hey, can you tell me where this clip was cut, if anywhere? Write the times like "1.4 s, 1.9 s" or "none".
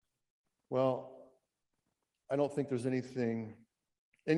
none